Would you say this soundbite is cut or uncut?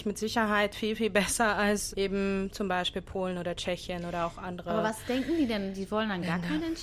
cut